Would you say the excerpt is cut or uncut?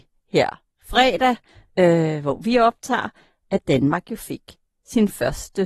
uncut